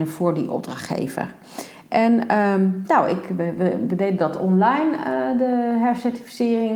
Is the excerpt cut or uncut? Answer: uncut